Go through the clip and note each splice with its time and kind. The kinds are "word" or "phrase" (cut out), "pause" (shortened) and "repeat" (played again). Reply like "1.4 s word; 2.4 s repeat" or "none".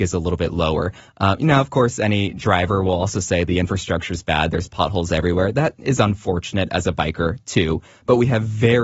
none